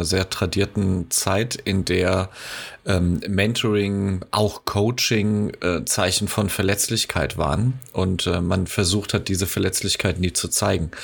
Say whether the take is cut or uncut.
uncut